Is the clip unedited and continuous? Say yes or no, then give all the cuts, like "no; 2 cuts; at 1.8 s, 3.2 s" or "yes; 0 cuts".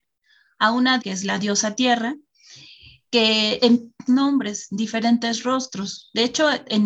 no; 2 cuts; at 1.0 s, 4.1 s